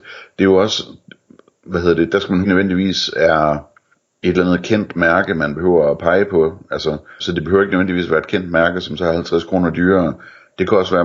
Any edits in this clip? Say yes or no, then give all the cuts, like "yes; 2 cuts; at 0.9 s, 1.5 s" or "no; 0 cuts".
yes; 3 cuts; at 2.4 s, 3.9 s, 7.2 s